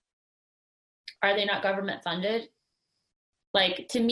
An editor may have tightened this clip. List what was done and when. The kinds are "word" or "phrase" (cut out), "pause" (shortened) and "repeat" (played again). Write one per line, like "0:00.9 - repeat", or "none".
none